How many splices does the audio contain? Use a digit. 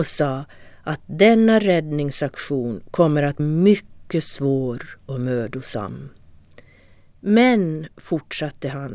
1